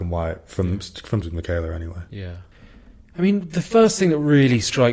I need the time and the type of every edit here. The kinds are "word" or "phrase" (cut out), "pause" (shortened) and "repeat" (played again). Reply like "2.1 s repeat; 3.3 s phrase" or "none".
1.2 s word